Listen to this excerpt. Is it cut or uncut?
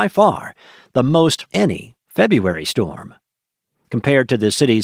cut